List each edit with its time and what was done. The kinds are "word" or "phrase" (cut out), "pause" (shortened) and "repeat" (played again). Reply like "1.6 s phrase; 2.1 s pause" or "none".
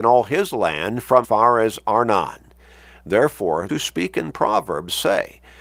1.2 s phrase; 3.7 s word